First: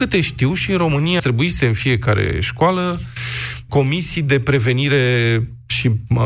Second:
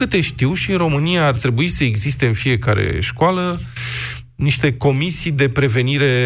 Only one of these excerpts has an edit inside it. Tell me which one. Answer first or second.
first